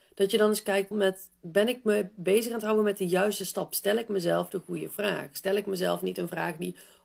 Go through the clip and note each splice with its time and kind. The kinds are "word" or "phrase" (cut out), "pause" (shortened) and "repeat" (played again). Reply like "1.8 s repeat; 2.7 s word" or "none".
0.9 s phrase